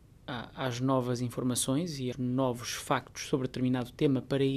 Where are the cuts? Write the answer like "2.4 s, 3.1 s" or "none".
2.1 s